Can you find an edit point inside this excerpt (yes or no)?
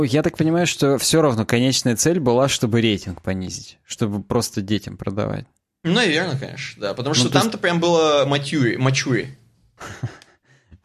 no